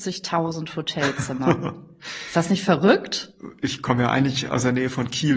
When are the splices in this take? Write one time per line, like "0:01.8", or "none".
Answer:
none